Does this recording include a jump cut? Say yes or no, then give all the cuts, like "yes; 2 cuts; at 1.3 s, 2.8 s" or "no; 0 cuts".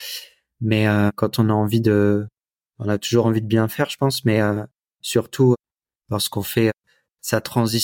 no; 0 cuts